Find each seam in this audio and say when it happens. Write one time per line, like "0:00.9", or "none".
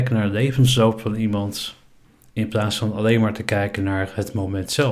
none